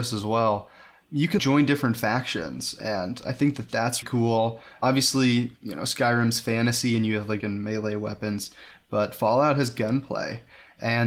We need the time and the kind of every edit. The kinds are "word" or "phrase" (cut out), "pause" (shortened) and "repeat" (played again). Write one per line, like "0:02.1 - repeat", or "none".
0:01.4 - word
0:04.0 - word
0:07.4 - word